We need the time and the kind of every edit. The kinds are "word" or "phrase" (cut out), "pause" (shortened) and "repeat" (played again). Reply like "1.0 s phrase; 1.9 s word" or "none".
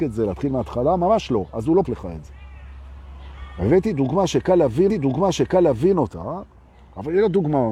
1.8 s word; 4.9 s repeat